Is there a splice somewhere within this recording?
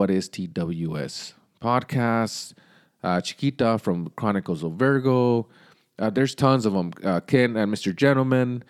no; 0 cuts

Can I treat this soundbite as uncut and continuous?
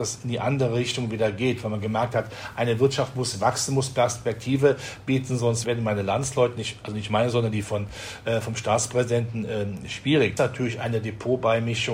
no; 2 cuts; at 5.6 s, 10.4 s

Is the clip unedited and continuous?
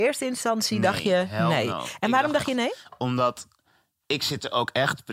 yes; 0 cuts

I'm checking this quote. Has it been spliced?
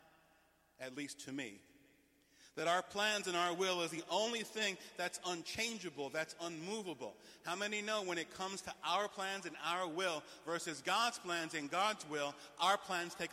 no; 0 cuts

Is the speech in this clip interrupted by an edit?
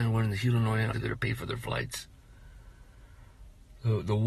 yes; 1 cut; at 0.9 s

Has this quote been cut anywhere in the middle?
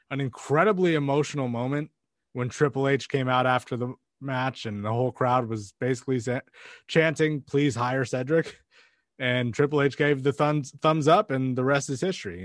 no; 0 cuts

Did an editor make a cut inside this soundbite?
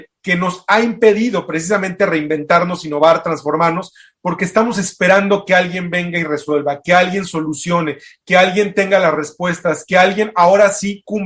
no; 0 cuts

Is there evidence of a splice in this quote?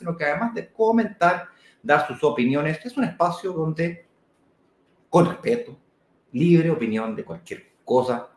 no; 0 cuts

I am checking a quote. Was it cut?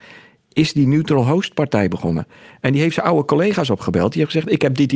no; 0 cuts

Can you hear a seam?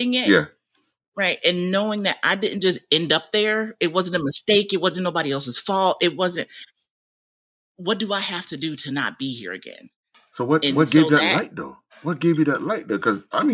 no; 0 cuts

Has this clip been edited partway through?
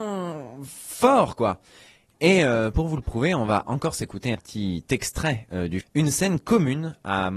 yes; 3 cuts; at 2.7 s, 4.3 s, 5.8 s

